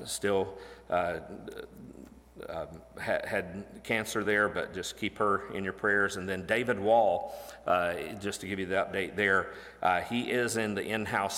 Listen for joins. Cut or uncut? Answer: uncut